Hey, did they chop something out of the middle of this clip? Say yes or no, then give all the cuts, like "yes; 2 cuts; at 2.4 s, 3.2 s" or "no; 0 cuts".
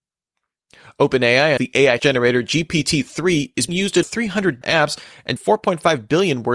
yes; 6 cuts; at 1.6 s, 2.0 s, 3.7 s, 4.0 s, 4.6 s, 5.4 s